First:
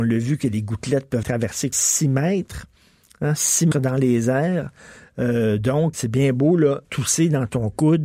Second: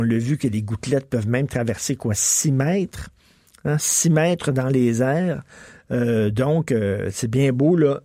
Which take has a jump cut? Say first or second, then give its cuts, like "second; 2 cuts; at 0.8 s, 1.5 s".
first; 5 cuts; at 1.2 s, 1.7 s, 3.7 s, 5.9 s, 6.8 s